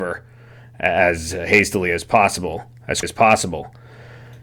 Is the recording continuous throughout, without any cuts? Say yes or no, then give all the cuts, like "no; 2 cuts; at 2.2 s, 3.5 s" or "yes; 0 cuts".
no; 1 cut; at 3.0 s